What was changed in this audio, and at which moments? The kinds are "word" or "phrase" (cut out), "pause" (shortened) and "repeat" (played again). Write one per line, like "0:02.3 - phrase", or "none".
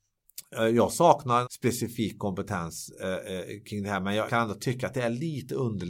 0:01.4 - word
0:04.3 - word